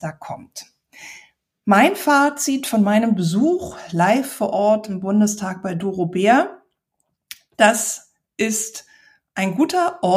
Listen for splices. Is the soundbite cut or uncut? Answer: uncut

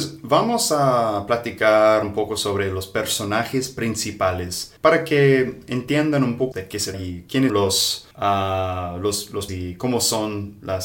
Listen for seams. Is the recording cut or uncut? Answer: cut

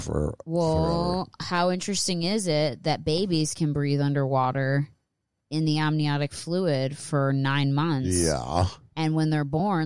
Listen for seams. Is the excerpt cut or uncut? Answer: uncut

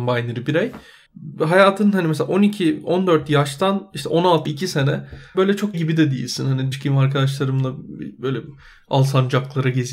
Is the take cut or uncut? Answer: cut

